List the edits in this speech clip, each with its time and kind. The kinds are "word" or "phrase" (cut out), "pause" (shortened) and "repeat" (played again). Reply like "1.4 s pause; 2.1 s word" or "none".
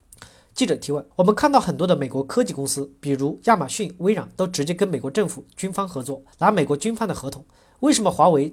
1.1 s pause; 6.3 s pause